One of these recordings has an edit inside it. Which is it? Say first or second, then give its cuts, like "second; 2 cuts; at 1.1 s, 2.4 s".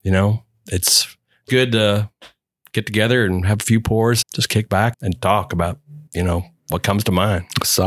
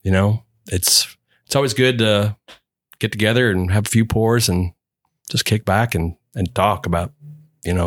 first; 4 cuts; at 1.5 s, 4.2 s, 4.9 s, 6.1 s